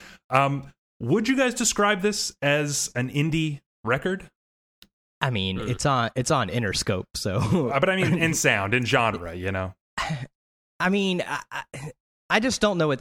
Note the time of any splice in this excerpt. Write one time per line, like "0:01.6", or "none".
none